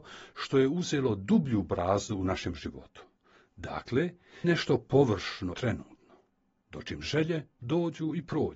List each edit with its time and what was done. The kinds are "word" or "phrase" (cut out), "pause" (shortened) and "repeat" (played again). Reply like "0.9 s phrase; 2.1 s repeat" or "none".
4.4 s word; 5.5 s word